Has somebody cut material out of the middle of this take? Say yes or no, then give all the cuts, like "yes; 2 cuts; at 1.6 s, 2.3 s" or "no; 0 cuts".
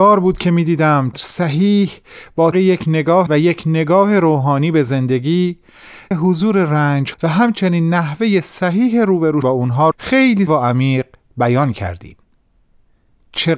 yes; 8 cuts; at 1.1 s, 2.5 s, 3.3 s, 6.1 s, 7.1 s, 9.4 s, 9.9 s, 10.5 s